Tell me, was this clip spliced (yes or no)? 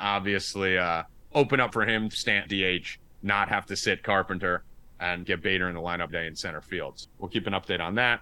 yes